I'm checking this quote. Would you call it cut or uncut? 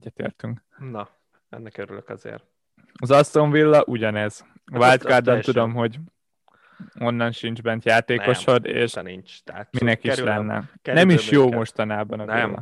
cut